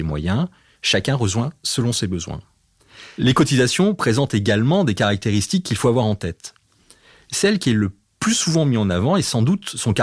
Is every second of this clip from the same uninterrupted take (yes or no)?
yes